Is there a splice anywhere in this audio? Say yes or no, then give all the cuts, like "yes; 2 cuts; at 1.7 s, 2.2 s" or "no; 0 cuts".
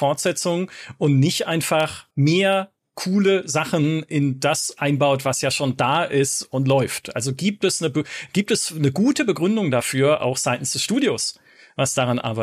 yes; 1 cut; at 2.1 s